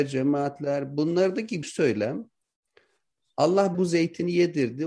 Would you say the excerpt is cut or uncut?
cut